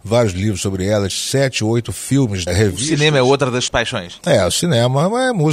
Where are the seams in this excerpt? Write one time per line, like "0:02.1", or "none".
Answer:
0:01.1
0:02.5
0:03.7